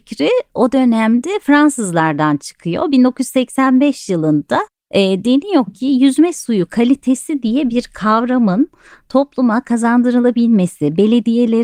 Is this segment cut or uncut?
uncut